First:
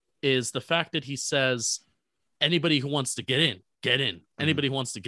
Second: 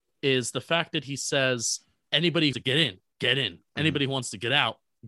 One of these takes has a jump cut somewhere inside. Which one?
second; 2 cuts; at 2.0 s, 2.5 s

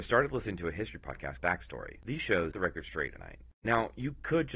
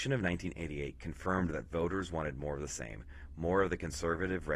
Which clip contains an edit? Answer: first; 4 cuts; at 1.4 s, 2.5 s, 3.2 s, 3.6 s

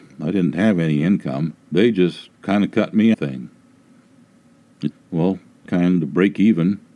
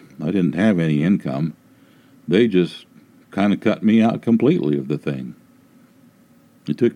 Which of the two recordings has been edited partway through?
first; 5 cuts; at 1.6 s, 2.3 s, 3.1 s, 4.9 s, 5.7 s

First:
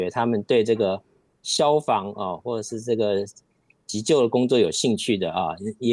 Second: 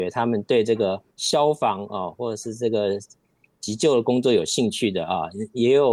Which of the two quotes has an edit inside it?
second; 1 cut; at 1.1 s

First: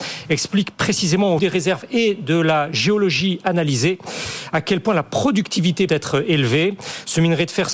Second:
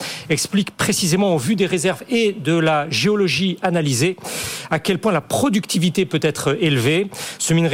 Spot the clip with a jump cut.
first; 2 cuts; at 1.4 s, 5.9 s

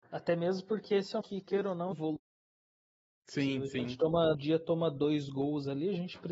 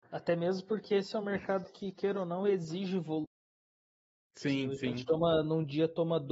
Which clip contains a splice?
first; 3 cuts; at 1.2 s, 1.9 s, 4.3 s

